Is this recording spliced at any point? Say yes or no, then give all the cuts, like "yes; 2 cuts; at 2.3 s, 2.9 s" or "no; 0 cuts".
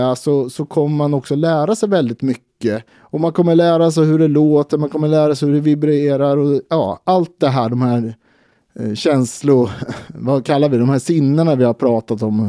yes; 1 cut; at 2.9 s